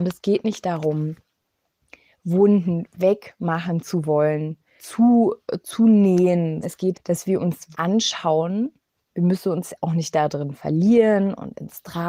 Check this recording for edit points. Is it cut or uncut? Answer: cut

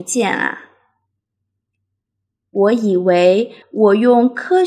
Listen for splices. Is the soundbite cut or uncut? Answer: cut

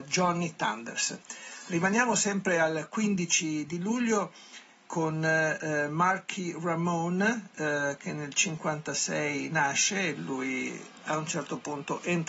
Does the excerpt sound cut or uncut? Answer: uncut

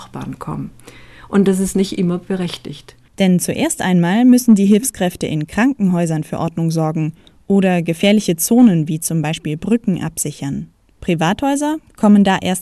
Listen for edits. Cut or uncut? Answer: uncut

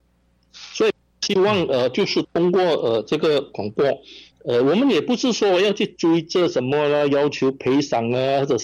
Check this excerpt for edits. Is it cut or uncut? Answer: uncut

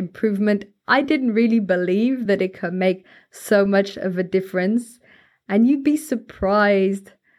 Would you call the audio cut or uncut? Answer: uncut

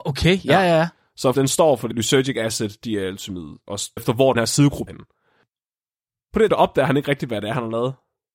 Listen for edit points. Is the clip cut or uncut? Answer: cut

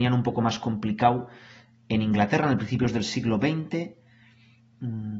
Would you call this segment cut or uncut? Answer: uncut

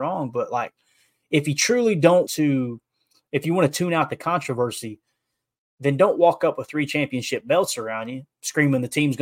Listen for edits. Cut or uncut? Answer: cut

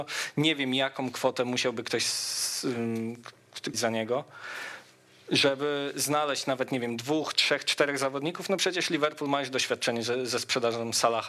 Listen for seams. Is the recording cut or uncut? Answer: cut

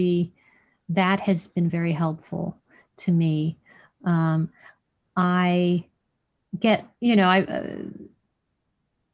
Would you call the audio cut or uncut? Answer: uncut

